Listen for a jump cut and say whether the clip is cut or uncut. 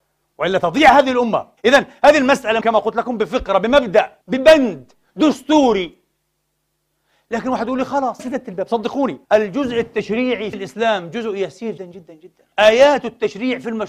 cut